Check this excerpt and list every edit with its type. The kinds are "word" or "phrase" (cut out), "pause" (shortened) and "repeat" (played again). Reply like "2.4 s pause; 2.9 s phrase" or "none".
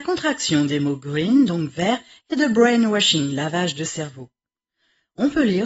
none